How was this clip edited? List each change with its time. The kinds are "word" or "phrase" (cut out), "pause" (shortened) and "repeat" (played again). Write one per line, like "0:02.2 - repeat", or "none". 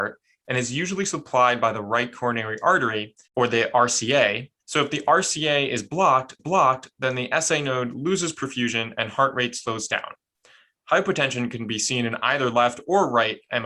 0:03.2 - pause
0:04.6 - pause
0:06.4 - repeat